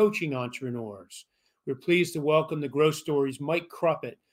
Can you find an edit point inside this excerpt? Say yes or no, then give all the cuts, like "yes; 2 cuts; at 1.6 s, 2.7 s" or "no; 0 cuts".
no; 0 cuts